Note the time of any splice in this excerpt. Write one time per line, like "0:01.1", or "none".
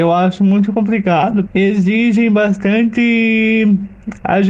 0:01.5